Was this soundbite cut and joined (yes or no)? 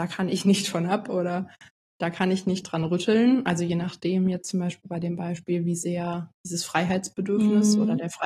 no